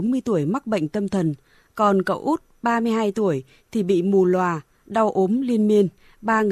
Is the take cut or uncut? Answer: uncut